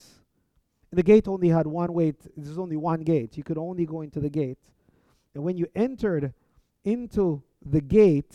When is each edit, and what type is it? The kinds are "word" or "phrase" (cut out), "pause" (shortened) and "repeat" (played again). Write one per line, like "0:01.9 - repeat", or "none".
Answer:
none